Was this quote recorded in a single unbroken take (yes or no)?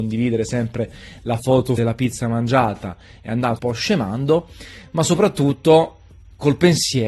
no